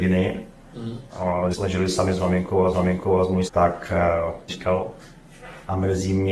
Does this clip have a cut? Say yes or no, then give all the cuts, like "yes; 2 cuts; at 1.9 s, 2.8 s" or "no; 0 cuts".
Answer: yes; 4 cuts; at 1.5 s, 2.7 s, 3.5 s, 4.5 s